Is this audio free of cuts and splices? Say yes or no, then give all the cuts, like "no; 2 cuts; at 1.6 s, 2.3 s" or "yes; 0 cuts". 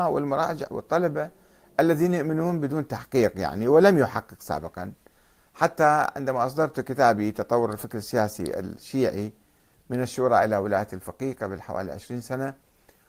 yes; 0 cuts